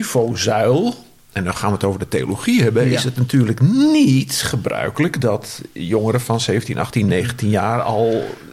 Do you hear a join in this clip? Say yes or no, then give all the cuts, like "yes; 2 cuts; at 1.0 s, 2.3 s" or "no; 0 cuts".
no; 0 cuts